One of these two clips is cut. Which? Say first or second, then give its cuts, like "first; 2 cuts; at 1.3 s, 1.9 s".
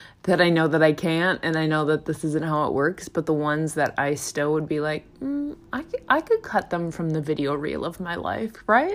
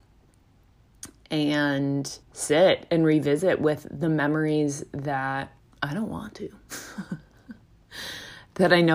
second; 2 cuts; at 2.2 s, 5.6 s